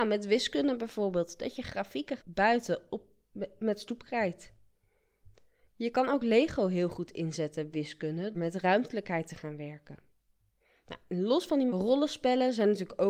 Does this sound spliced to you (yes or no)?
yes